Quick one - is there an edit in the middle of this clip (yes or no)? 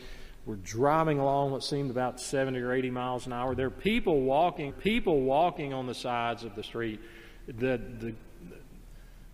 yes